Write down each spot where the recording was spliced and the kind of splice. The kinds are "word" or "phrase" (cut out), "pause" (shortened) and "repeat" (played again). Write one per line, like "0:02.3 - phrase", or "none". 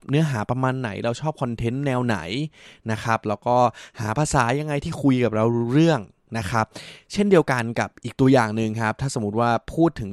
none